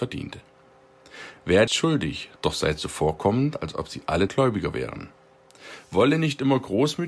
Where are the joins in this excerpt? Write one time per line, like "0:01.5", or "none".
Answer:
0:01.7
0:02.4
0:04.3